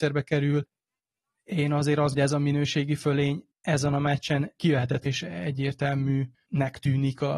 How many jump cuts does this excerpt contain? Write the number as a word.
three